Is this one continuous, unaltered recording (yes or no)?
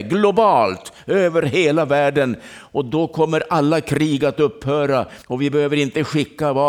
no